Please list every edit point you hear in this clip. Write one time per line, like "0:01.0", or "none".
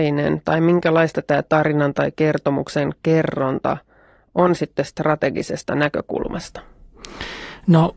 none

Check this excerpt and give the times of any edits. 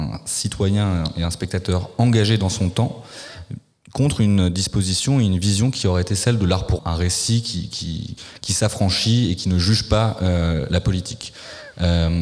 0:06.8

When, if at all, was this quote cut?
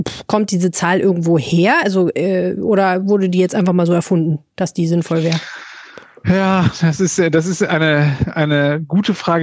none

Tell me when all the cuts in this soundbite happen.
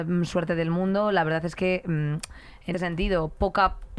0:02.7

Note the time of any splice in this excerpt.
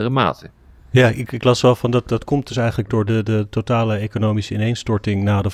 none

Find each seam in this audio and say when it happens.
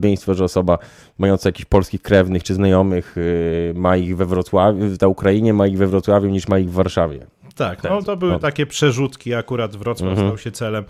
0:08.0

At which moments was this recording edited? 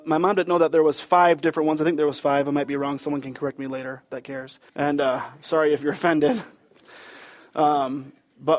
0:04.7

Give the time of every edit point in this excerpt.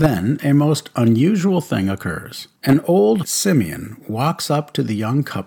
0:02.6
0:03.2

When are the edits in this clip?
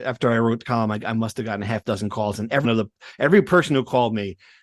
0:02.6

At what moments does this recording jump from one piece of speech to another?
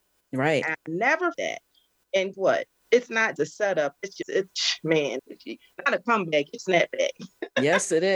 0:01.3
0:02.3
0:03.4
0:04.2
0:05.2
0:06.6

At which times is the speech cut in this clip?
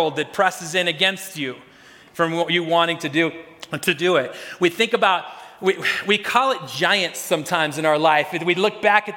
none

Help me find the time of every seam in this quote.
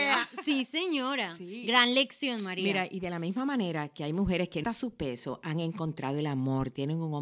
0:04.6

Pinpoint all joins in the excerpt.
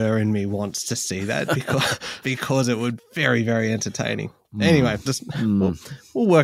0:01.5
0:02.2
0:03.0
0:05.1

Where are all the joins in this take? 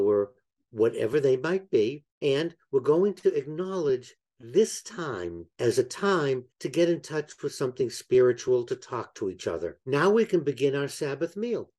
0:02.1
0:05.5
0:06.5
0:09.8

